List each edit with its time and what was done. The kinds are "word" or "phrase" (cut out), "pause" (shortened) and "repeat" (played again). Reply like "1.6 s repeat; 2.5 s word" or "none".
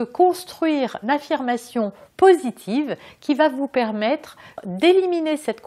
1.0 s word; 2.1 s pause

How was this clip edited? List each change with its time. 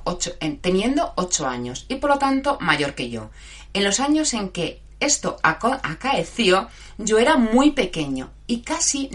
none

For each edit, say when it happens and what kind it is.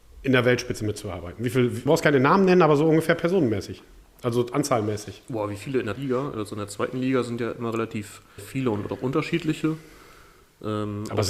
1.9 s word; 6.0 s word; 8.4 s word

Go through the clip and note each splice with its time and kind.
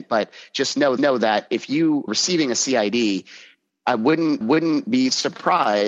1.0 s repeat; 2.1 s word; 4.4 s repeat

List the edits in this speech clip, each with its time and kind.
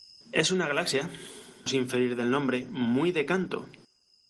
1.7 s phrase

